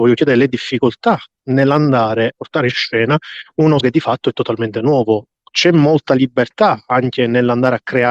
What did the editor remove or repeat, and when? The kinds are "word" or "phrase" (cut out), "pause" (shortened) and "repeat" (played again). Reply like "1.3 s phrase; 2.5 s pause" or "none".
2.3 s word; 3.8 s word

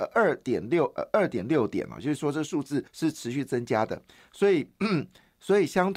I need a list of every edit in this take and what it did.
2.9 s pause

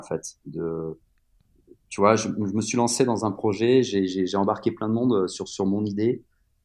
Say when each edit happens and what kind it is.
none

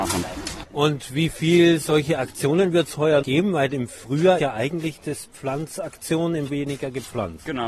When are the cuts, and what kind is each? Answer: 3.2 s word; 4.4 s word; 6.5 s phrase

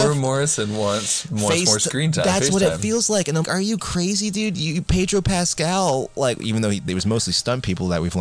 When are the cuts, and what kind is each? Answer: 3.4 s word

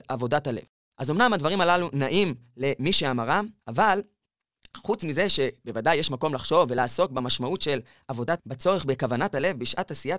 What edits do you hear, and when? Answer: 3.6 s pause; 8.4 s word

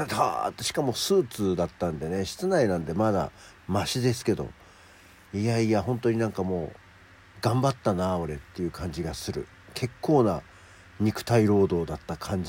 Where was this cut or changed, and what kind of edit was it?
none

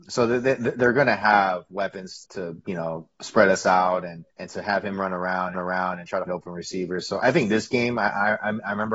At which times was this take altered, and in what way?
2.2 s word; 4.3 s pause; 5.5 s repeat; 6.3 s word

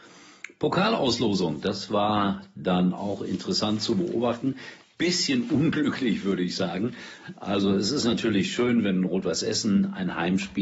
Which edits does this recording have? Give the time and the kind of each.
none

